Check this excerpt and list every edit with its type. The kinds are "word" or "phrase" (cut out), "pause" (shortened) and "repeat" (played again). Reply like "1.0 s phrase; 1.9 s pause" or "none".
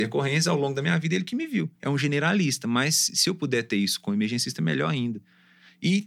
1.8 s pause